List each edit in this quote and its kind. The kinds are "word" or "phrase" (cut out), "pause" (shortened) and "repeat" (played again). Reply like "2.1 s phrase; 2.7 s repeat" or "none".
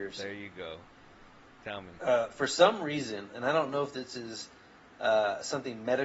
2.0 s pause